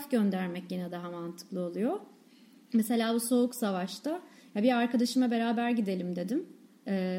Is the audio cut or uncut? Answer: uncut